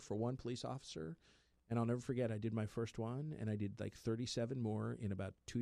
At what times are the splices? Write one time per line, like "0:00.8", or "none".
none